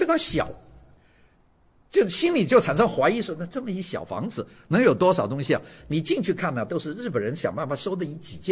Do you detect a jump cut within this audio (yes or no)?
no